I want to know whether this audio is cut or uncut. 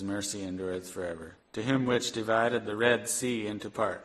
cut